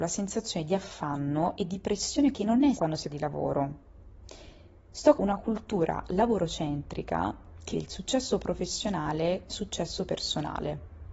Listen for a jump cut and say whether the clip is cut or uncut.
cut